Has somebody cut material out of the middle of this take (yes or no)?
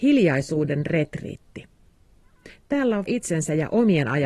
yes